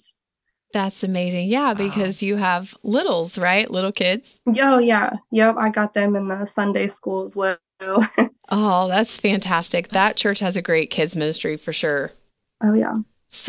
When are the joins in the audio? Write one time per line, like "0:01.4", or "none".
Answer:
0:12.3